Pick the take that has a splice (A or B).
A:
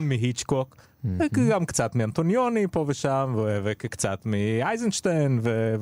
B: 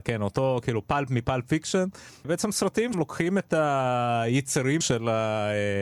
B